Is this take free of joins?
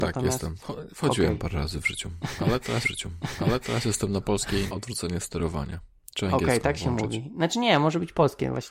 no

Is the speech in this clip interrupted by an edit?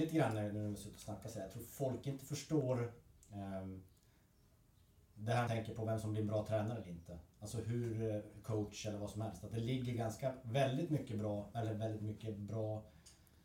yes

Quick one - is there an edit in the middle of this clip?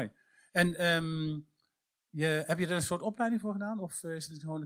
no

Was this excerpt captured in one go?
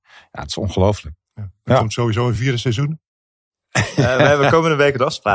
yes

